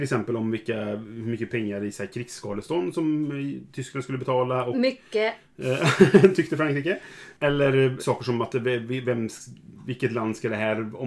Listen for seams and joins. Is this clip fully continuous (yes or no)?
no